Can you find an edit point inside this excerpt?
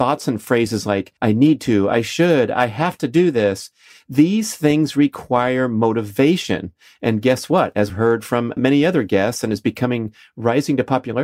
yes; 3 cuts; at 1.2 s, 7.9 s, 8.6 s

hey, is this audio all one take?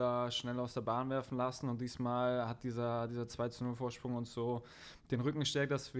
yes; 0 cuts

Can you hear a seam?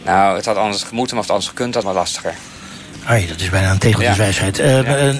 yes; 1 cut; at 1.8 s

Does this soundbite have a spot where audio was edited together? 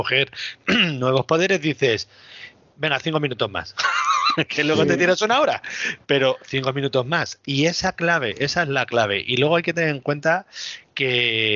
no; 0 cuts

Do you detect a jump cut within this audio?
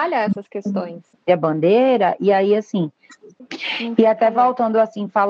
no; 0 cuts

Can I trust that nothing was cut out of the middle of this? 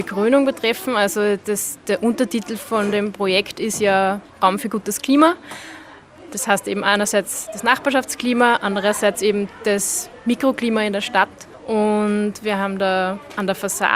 yes; 0 cuts

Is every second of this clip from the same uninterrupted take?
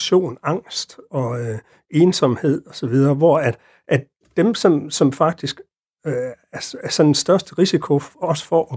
yes; 0 cuts

